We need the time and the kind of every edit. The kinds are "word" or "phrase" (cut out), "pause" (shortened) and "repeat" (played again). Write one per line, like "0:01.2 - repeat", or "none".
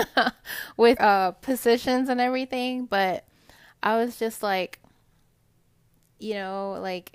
0:01.0 - word